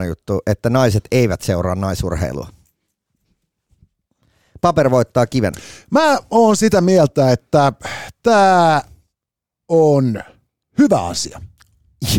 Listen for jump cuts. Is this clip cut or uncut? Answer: uncut